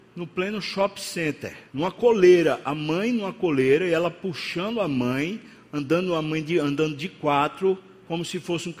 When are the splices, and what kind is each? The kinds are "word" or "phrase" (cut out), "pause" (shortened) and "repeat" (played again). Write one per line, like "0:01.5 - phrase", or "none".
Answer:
0:01.7 - pause